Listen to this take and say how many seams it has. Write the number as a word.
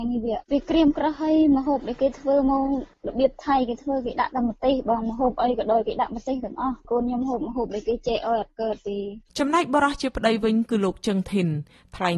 one